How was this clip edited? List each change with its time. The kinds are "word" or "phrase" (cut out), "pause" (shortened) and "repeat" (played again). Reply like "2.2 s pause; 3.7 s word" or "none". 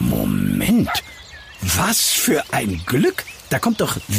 none